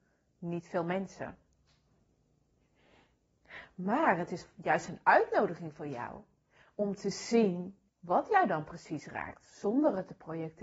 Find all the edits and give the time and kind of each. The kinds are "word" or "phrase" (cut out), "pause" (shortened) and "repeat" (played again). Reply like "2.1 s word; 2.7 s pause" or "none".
7.9 s pause